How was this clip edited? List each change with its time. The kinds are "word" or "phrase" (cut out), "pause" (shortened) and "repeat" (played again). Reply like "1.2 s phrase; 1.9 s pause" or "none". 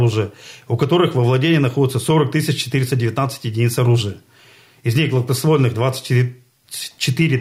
none